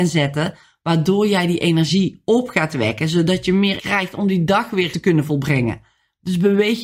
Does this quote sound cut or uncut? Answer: cut